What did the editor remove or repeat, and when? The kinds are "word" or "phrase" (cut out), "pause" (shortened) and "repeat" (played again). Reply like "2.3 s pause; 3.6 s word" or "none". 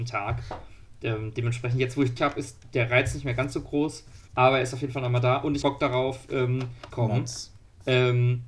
2.2 s word; 4.3 s pause; 5.6 s phrase; 6.9 s phrase